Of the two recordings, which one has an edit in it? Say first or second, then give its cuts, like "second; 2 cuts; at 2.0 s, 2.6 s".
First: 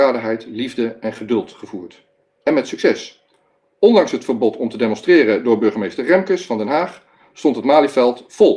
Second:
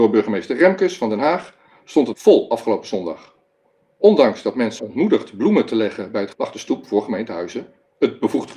second; 3 cuts; at 2.1 s, 4.8 s, 6.3 s